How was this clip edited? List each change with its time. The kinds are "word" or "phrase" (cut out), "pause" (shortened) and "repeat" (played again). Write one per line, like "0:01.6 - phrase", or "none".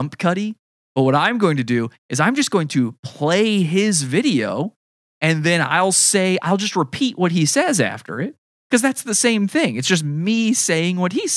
none